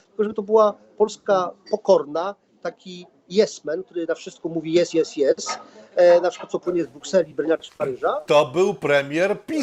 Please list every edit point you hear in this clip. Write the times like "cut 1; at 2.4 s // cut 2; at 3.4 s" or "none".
none